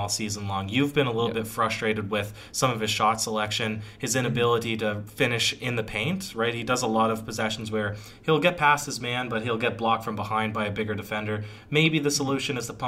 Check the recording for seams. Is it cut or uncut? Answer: uncut